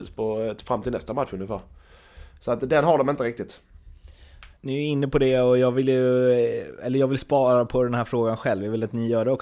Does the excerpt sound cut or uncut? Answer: cut